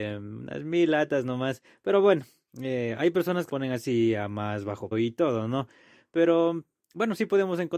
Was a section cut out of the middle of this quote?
yes; 2 cuts; at 3.5 s, 4.9 s

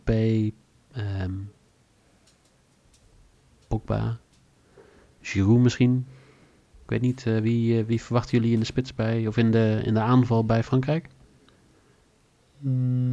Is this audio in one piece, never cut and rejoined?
yes; 0 cuts

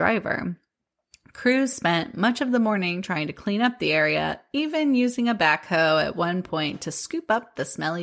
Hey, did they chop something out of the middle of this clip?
no; 0 cuts

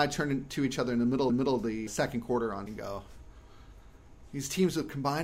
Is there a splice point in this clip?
yes; 3 cuts; at 1.3 s, 1.9 s, 2.7 s

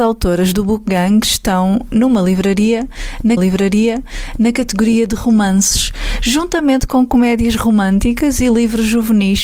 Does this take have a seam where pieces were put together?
yes; 1 cut; at 3.4 s

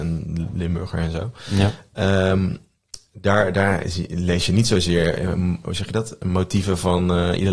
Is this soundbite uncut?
yes; 0 cuts

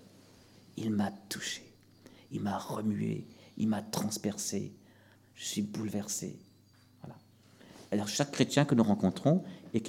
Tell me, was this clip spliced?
no; 0 cuts

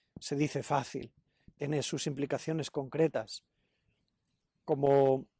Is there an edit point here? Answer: no; 0 cuts

